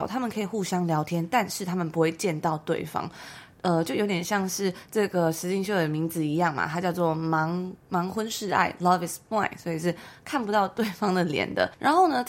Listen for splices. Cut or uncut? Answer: uncut